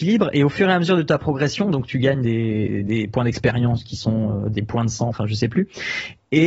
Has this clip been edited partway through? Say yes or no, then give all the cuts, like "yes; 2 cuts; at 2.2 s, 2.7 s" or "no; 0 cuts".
no; 0 cuts